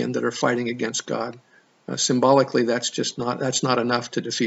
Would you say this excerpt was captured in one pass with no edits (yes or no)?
yes